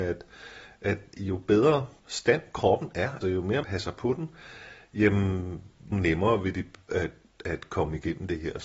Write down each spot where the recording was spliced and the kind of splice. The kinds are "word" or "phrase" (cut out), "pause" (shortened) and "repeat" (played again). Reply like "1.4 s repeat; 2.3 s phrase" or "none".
2.0 s pause; 3.2 s word; 3.6 s word; 5.9 s phrase; 6.9 s word

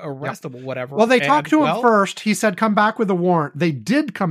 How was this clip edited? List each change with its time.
none

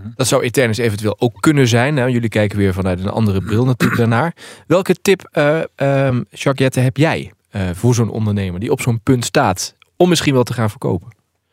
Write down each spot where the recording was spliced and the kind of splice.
none

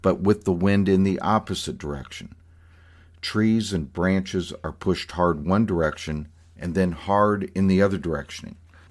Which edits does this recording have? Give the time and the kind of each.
none

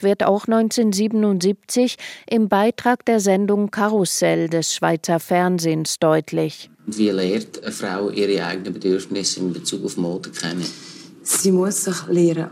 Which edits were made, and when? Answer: none

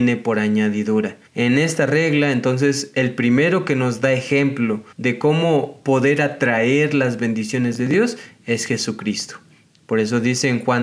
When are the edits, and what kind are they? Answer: 1.3 s pause; 4.9 s pause

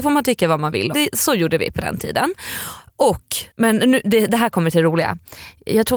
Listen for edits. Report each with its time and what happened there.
0.9 s phrase; 3.5 s pause

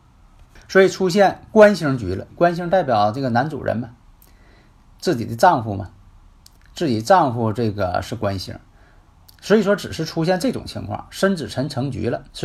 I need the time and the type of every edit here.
2.3 s phrase

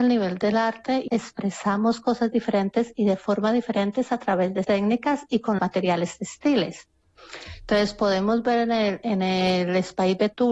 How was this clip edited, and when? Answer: 1.1 s word; 4.6 s word; 5.6 s word

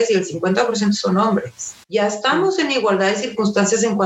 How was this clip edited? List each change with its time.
1.8 s pause

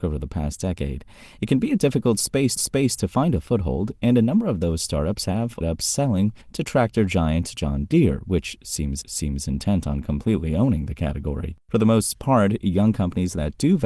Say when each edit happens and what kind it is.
2.6 s repeat; 5.6 s phrase; 6.4 s pause; 9.0 s repeat; 11.6 s pause

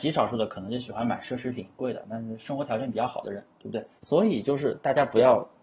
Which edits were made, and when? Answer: 4.0 s pause

